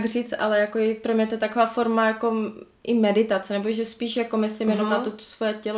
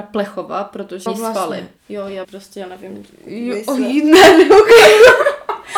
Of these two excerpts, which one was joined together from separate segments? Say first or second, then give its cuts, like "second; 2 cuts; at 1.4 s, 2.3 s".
second; 3 cuts; at 1.1 s, 1.8 s, 2.2 s